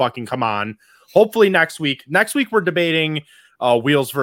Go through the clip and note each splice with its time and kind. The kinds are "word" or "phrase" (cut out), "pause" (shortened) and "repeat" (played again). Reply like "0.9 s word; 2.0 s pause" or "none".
none